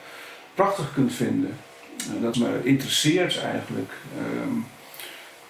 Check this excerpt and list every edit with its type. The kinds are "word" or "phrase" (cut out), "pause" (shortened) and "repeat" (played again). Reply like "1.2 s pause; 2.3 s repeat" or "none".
2.3 s phrase